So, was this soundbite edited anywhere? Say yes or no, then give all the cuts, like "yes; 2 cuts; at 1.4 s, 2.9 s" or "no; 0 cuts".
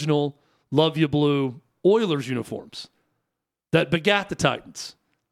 no; 0 cuts